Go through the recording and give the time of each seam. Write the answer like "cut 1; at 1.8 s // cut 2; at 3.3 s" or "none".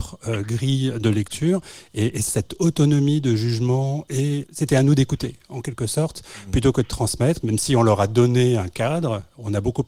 cut 1; at 2.3 s // cut 2; at 4.5 s